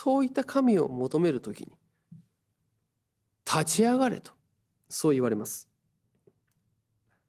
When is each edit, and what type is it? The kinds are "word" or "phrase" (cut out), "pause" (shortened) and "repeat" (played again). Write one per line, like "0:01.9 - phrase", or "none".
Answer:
none